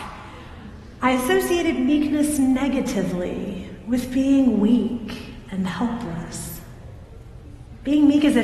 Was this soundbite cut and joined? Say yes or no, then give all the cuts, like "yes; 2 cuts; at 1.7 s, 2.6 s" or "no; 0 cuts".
no; 0 cuts